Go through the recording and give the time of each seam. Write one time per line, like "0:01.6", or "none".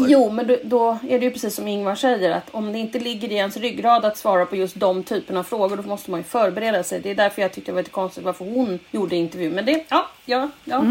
0:08.9